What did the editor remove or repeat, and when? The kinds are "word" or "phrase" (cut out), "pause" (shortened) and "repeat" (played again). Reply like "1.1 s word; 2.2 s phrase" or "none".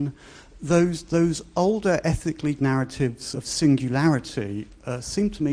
2.6 s word; 3.3 s word